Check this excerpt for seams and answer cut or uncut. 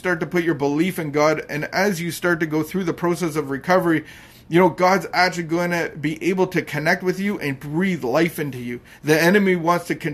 uncut